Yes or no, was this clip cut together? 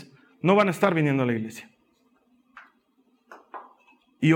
no